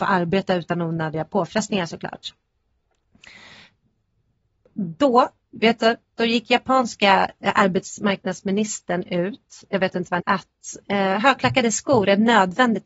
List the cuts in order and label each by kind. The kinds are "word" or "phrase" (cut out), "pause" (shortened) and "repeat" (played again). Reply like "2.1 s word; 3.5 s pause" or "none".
10.2 s phrase